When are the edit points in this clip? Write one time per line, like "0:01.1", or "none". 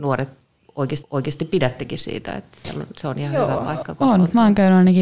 0:01.0